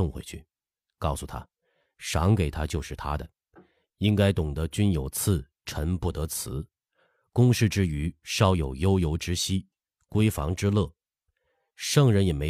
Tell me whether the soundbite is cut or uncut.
uncut